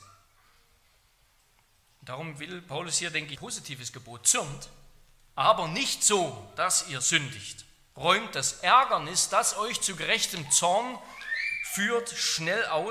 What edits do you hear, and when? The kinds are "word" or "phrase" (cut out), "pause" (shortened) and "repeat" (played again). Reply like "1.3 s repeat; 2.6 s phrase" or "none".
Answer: 3.4 s phrase